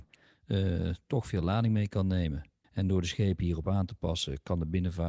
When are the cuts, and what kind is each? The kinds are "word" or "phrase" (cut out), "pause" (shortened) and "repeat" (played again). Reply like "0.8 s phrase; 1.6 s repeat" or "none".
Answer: 2.6 s pause